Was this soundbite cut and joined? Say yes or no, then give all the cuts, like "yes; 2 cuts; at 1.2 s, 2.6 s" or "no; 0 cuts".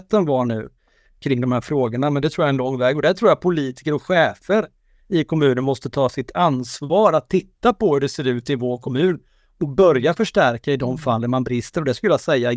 no; 0 cuts